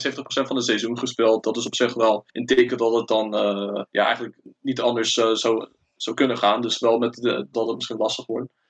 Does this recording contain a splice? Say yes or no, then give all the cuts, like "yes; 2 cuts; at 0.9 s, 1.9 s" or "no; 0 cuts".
yes; 3 cuts; at 2.3 s, 3.9 s, 7.5 s